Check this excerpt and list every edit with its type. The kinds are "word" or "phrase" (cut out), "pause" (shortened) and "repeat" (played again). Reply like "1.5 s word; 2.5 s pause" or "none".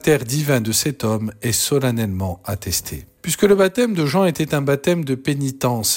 none